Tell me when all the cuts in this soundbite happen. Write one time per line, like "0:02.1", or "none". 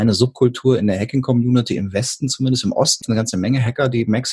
0:03.0